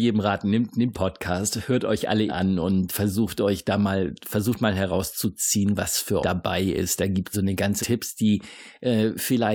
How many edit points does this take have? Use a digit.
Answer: 6